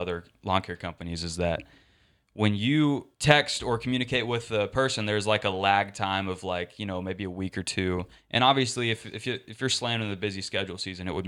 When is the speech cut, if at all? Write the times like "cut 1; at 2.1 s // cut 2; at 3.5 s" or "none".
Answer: cut 1; at 3.1 s